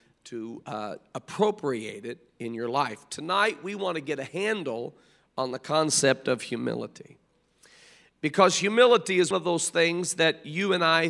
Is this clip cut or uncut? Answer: cut